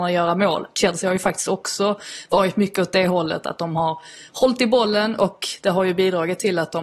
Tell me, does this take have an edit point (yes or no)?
no